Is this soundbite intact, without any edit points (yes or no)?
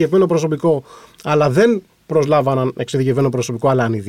yes